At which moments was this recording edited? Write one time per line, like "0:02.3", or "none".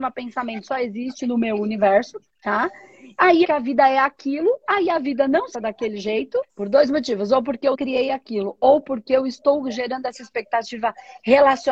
0:02.3
0:03.4
0:05.5
0:06.5
0:07.7